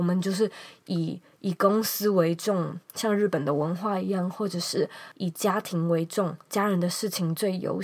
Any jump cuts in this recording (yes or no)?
yes